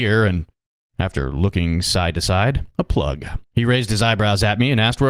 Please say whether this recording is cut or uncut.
cut